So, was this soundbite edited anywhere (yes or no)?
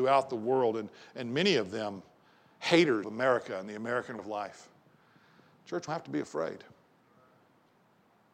yes